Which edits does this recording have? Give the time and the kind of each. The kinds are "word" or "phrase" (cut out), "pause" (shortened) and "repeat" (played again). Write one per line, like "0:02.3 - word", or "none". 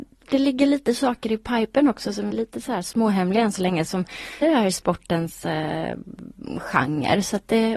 0:02.3 - word
0:04.4 - phrase